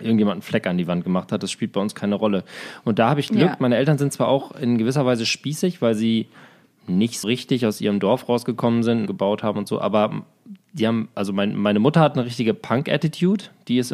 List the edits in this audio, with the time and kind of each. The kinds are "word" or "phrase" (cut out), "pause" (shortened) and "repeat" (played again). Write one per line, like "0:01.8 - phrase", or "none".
0:07.2 - word
0:09.1 - word